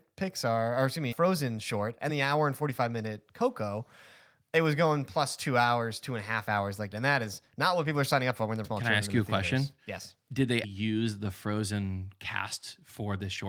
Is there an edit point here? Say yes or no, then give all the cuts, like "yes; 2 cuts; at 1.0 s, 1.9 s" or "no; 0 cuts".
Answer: yes; 5 cuts; at 1.1 s, 2.1 s, 6.9 s, 8.6 s, 10.6 s